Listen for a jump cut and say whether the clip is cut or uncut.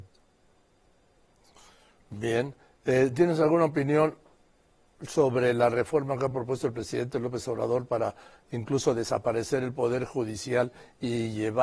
uncut